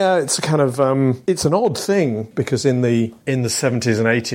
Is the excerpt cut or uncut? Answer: cut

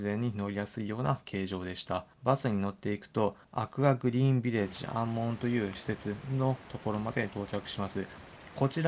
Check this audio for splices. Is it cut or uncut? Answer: cut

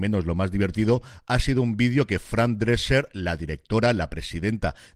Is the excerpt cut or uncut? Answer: uncut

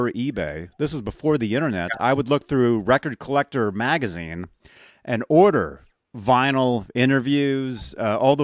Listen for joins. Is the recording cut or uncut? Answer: uncut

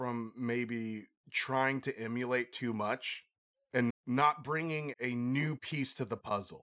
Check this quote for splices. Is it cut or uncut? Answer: cut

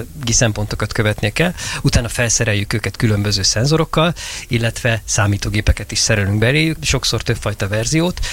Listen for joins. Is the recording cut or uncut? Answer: cut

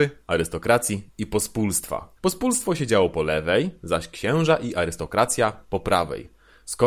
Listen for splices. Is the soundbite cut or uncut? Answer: cut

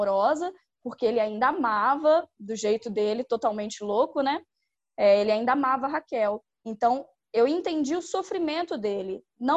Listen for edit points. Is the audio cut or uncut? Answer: uncut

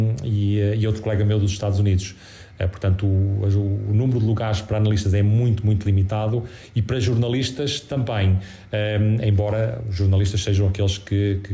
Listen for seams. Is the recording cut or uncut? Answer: uncut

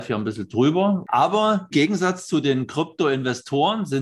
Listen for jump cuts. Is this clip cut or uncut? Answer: cut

